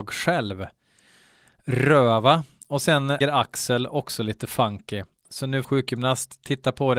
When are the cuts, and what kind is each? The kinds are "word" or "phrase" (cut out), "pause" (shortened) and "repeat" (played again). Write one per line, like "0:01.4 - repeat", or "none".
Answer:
0:03.2 - word
0:05.6 - phrase

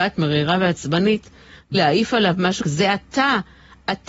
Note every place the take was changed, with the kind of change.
0:01.7 - word
0:02.6 - word

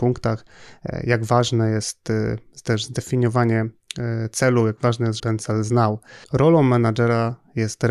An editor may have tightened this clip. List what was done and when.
0:05.2 - phrase
0:06.2 - pause

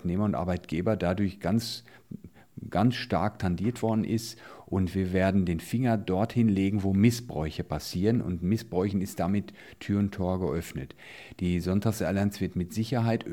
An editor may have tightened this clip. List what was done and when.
none

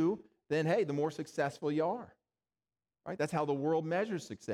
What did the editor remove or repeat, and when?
none

